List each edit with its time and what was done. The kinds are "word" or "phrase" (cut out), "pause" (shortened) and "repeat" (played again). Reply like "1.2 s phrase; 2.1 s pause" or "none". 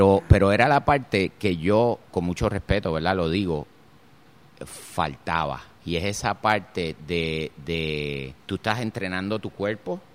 2.1 s pause; 5.7 s pause; 8.4 s pause